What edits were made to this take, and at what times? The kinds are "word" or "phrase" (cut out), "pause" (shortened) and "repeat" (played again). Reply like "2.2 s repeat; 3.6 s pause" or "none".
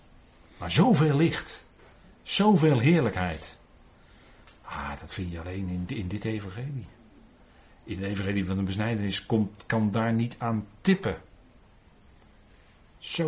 none